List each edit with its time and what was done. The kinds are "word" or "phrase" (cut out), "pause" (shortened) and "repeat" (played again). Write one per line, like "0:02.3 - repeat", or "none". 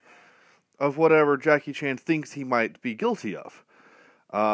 none